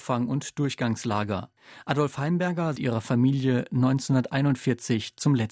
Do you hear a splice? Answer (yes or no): yes